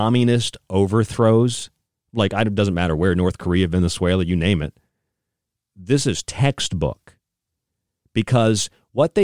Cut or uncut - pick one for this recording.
uncut